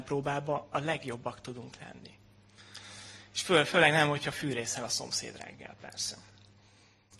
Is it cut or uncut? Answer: uncut